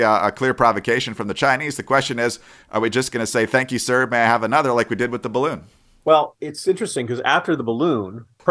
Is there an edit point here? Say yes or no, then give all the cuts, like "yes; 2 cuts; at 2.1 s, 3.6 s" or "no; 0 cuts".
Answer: no; 0 cuts